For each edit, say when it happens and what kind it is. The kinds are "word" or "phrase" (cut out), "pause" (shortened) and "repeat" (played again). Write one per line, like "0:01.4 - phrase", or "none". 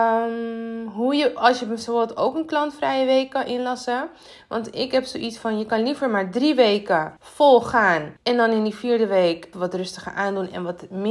0:07.2 - pause
0:08.2 - pause
0:09.5 - word